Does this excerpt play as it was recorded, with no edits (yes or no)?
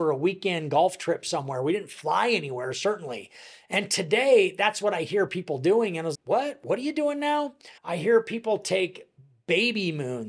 no